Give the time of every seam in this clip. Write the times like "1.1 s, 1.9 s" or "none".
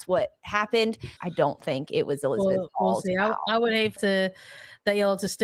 1.2 s, 4.0 s

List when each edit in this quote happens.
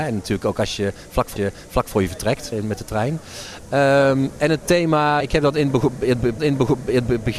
1.4 s, 2.5 s, 5.2 s, 6.4 s

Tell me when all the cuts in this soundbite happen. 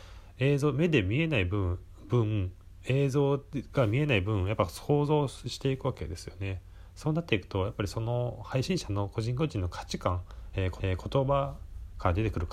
10.8 s

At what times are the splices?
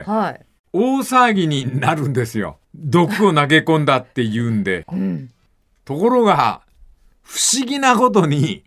2.6 s

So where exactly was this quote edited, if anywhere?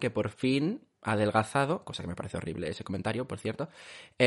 0.9 s

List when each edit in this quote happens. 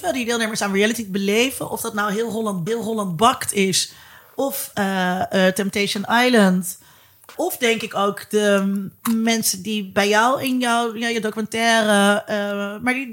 2.7 s, 4.7 s, 7.3 s

